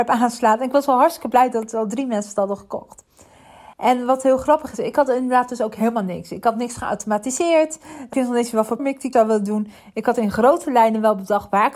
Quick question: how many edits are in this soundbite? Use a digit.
3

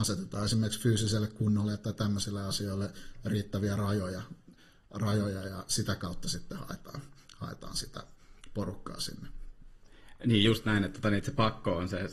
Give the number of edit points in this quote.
0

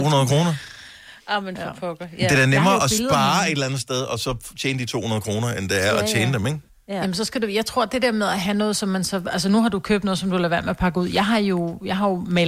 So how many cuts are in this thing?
2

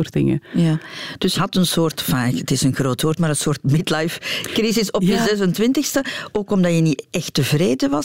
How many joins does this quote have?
1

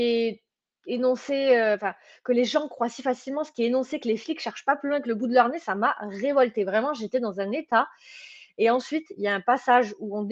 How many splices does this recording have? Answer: 0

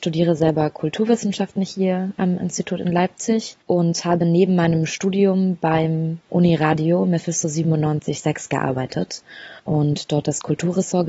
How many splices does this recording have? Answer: 2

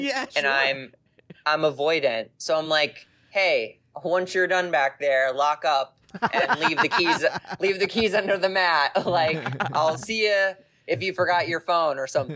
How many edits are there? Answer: 0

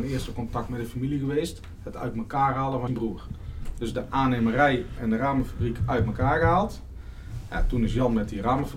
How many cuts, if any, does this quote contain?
1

